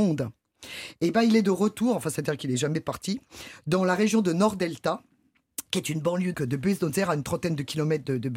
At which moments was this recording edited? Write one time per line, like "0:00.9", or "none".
0:06.3